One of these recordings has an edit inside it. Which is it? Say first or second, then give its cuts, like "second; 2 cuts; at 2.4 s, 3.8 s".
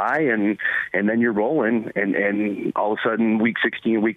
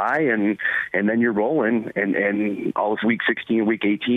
second; 1 cut; at 3.0 s